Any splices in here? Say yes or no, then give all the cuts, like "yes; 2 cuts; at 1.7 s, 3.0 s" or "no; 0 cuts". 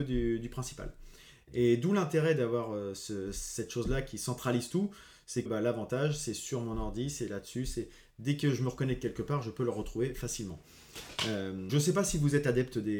yes; 2 cuts; at 5.5 s, 11.7 s